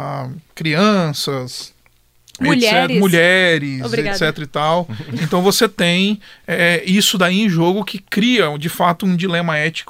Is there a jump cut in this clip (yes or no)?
no